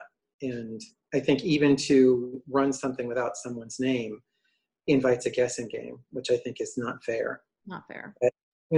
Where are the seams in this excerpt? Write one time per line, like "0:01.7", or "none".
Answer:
none